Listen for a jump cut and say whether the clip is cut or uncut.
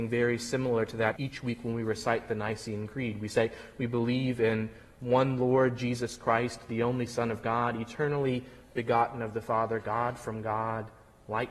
cut